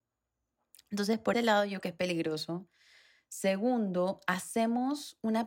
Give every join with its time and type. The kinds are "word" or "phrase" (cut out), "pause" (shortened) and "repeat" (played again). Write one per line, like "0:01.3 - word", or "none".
0:01.3 - word
0:01.8 - word